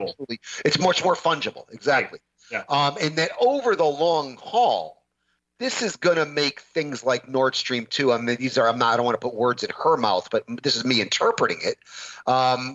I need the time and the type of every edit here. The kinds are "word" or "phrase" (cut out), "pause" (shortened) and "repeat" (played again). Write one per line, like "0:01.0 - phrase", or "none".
none